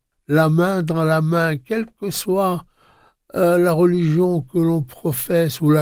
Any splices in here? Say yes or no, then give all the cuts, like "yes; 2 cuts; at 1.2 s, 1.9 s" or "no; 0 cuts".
no; 0 cuts